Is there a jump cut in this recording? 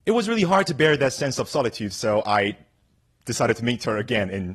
no; 0 cuts

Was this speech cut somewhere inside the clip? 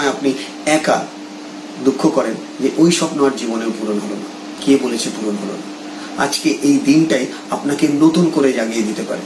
no; 0 cuts

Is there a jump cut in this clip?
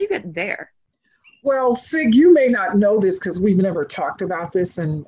no; 0 cuts

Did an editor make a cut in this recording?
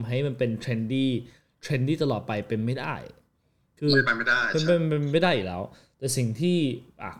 no; 0 cuts

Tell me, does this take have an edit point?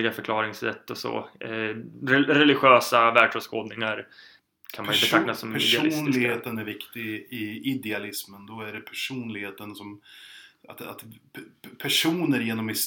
no; 0 cuts

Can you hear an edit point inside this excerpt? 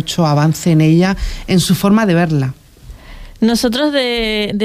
no; 0 cuts

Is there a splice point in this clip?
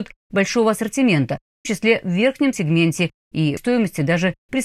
yes; 3 cuts; at 1.6 s, 2.5 s, 3.6 s

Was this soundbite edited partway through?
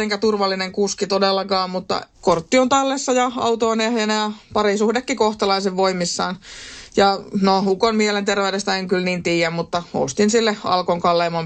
yes; 1 cut; at 2.1 s

